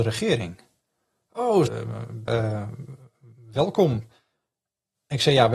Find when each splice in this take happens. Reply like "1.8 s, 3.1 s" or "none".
1.7 s, 2.3 s